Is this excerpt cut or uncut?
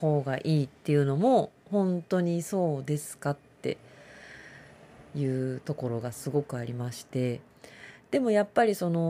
uncut